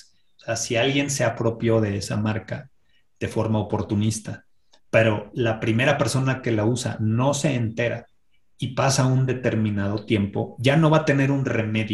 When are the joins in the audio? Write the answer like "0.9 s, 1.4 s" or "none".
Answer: none